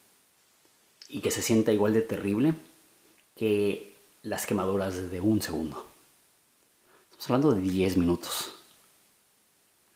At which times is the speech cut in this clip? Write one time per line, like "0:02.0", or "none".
none